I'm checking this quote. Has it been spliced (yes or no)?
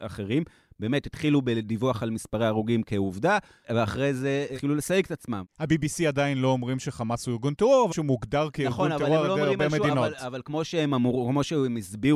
yes